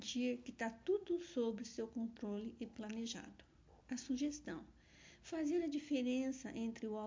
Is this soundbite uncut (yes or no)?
no